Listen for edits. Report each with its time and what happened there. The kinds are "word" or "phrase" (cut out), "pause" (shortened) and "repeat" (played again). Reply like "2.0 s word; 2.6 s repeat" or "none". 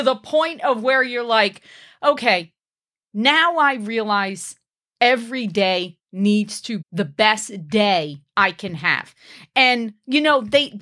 6.8 s word